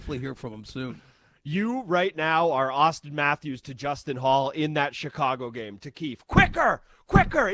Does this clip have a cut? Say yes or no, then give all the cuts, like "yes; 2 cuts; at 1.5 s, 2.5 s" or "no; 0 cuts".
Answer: no; 0 cuts